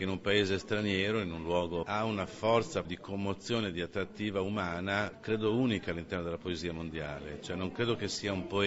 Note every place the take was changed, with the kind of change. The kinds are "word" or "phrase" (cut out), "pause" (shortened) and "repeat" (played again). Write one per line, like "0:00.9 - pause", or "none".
0:01.8 - phrase
0:02.8 - word